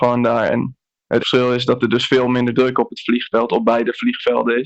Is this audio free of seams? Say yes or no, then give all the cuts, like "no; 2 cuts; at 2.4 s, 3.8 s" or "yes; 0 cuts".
no; 1 cut; at 1.2 s